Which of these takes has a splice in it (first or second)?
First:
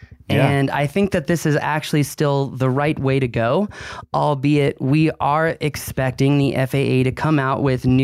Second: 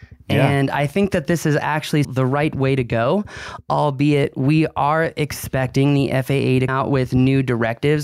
second